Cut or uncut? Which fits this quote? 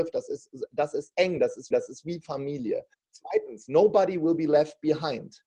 cut